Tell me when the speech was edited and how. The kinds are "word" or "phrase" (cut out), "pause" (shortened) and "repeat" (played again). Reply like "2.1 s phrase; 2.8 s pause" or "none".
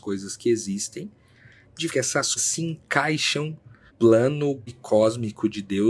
1.9 s word; 2.4 s word; 3.9 s word; 4.7 s word